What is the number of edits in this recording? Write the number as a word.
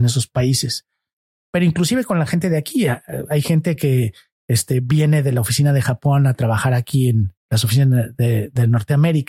zero